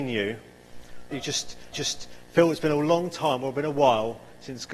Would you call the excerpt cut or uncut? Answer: cut